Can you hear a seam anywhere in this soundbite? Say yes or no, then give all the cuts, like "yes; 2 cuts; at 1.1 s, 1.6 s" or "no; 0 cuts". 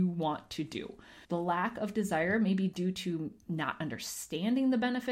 yes; 1 cut; at 1.2 s